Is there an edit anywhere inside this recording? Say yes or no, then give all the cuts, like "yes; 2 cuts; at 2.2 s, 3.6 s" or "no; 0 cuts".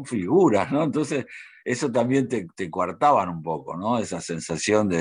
no; 0 cuts